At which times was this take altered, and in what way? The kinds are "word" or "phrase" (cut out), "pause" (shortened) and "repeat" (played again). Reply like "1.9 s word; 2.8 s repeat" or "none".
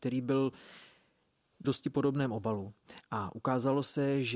1.6 s phrase